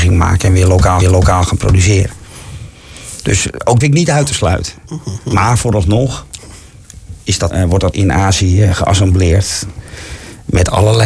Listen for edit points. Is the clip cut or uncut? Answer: cut